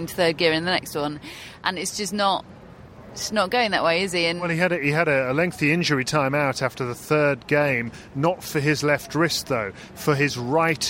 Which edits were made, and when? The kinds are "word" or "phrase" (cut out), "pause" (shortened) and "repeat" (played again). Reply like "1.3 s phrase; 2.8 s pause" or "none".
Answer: none